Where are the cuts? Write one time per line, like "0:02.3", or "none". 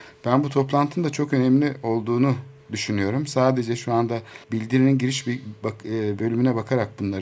0:04.4